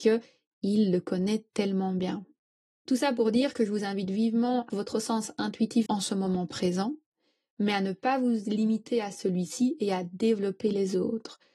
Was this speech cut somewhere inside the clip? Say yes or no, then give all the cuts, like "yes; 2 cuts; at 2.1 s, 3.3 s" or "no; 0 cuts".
yes; 2 cuts; at 4.7 s, 5.9 s